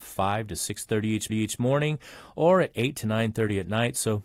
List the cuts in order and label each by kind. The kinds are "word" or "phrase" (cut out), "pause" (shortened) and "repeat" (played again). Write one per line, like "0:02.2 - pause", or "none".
0:01.3 - repeat